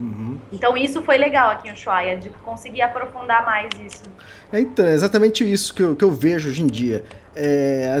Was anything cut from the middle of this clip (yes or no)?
no